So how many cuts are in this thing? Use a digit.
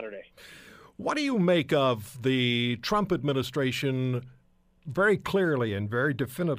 0